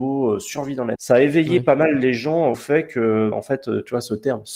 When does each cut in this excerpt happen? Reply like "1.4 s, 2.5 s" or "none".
1.0 s, 2.5 s, 3.3 s